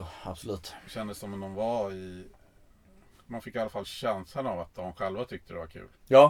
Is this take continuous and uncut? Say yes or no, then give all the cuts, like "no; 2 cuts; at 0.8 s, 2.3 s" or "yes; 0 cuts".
yes; 0 cuts